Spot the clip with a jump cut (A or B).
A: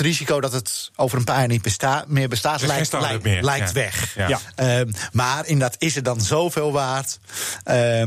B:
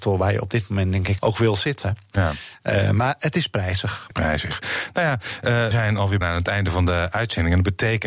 B